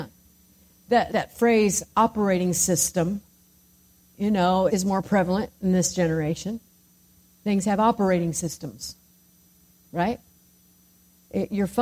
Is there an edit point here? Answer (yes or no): yes